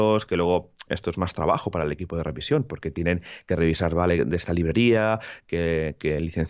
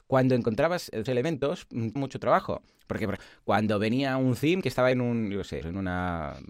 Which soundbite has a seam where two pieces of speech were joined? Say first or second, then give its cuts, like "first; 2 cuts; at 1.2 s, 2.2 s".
second; 4 cuts; at 1.1 s, 2.0 s, 3.2 s, 4.9 s